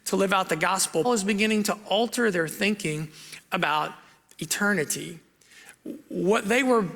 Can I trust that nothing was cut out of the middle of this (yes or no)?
no